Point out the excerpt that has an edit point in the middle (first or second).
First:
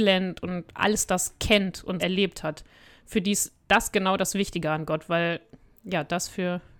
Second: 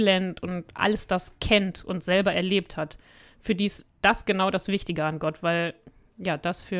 first